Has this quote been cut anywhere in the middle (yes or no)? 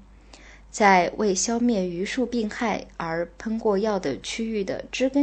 no